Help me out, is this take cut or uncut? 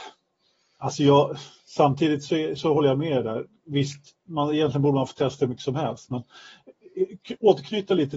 uncut